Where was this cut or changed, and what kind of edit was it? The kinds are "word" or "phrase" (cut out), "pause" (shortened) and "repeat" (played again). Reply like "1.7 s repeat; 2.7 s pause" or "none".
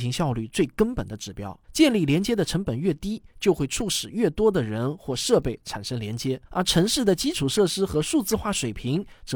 1.6 s pause; 6.5 s pause